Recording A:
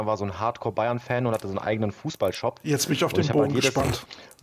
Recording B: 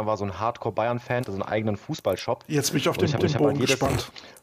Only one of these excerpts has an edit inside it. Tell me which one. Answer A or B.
B